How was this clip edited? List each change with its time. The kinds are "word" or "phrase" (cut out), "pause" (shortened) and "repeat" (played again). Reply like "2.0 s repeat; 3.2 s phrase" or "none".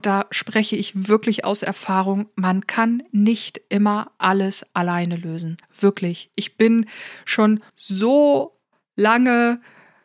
5.6 s pause; 7.7 s pause